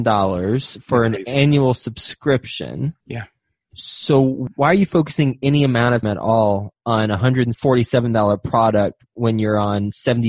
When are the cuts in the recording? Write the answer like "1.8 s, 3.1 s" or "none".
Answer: 3.0 s, 6.0 s